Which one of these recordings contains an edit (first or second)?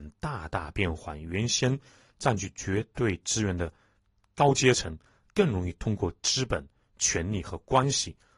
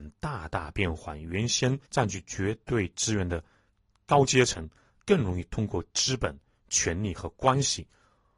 second